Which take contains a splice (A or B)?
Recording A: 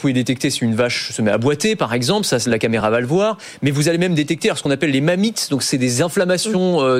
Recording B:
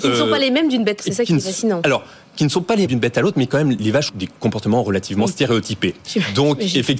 B